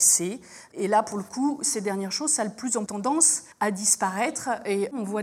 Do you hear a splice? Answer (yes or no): yes